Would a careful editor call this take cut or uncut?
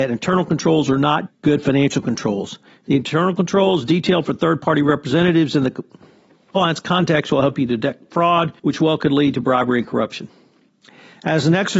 cut